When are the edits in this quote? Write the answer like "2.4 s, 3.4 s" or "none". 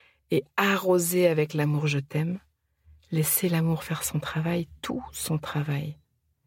none